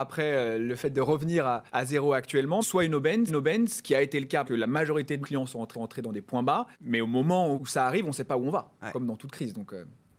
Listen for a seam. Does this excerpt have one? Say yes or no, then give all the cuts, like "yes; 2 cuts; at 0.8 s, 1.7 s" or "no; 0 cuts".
yes; 8 cuts; at 1.7 s, 2.6 s, 3.3 s, 4.5 s, 5.2 s, 5.7 s, 6.7 s, 7.6 s